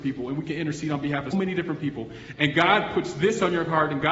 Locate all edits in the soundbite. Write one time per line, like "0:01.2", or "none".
0:01.3